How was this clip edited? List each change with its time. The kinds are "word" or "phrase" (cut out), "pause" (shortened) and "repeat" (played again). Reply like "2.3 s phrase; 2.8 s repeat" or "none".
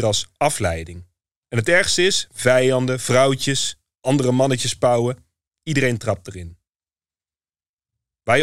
none